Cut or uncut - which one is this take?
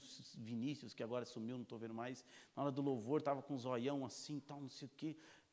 uncut